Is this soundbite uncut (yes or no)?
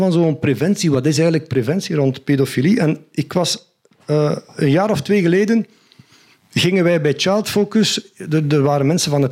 yes